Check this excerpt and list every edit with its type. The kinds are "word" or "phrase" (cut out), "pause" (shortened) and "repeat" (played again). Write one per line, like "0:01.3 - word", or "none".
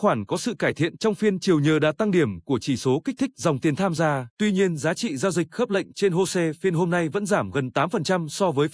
0:04.3 - pause